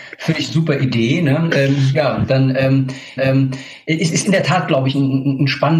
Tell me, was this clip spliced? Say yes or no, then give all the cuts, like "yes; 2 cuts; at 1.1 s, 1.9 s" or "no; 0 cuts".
yes; 1 cut; at 3.2 s